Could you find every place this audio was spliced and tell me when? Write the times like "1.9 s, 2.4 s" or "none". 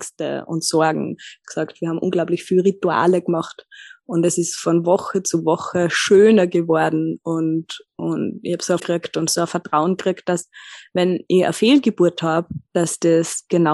8.8 s, 9.3 s